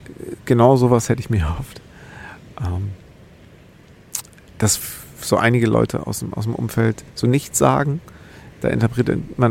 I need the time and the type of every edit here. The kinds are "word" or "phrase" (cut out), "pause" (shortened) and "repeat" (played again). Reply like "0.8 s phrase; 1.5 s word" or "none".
7.1 s pause